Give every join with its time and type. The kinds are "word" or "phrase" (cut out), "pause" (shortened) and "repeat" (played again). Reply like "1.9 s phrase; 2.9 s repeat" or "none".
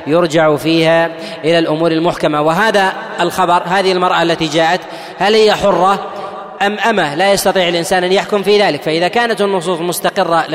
6.6 s word